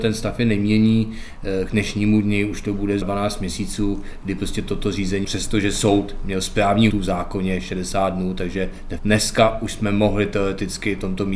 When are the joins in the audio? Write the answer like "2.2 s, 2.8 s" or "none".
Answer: 3.0 s, 5.2 s, 6.9 s, 9.0 s